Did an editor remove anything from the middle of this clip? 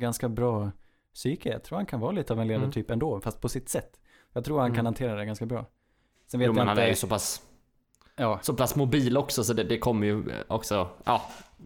no; 0 cuts

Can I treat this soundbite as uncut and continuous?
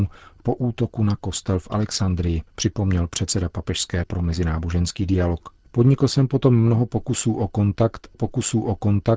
no; 4 cuts; at 2.5 s, 4.0 s, 5.6 s, 8.1 s

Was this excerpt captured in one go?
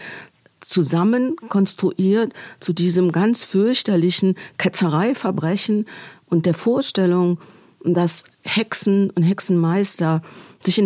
yes; 0 cuts

